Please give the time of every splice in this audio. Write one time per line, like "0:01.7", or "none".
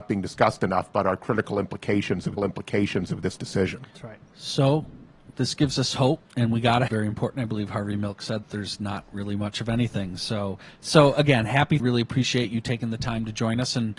0:02.4
0:03.9
0:06.3
0:06.9
0:08.4
0:11.8